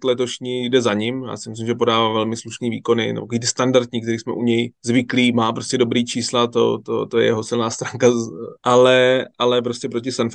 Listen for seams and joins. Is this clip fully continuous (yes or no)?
no